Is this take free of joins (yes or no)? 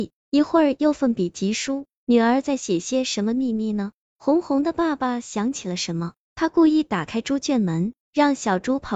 no